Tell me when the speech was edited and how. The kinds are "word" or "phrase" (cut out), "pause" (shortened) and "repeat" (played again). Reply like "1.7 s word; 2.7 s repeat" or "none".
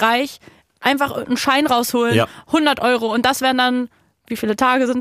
none